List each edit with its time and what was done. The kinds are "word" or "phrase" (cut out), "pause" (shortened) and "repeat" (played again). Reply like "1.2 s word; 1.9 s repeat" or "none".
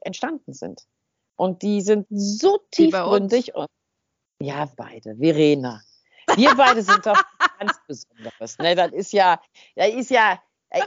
2.0 s word; 4.7 s word